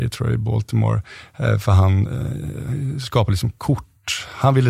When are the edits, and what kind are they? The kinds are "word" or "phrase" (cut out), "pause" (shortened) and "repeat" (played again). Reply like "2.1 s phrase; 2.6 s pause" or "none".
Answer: none